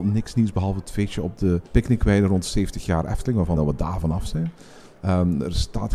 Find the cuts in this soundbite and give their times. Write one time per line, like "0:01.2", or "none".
0:01.7
0:03.6